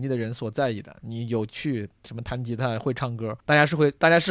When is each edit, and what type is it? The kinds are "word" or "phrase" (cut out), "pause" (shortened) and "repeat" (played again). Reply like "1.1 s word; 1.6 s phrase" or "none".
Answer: 3.4 s pause